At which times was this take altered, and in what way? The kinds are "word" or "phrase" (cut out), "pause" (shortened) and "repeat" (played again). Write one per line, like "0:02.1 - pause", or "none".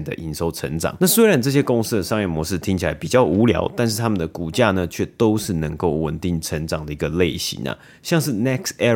none